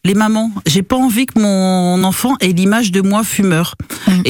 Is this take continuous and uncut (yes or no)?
yes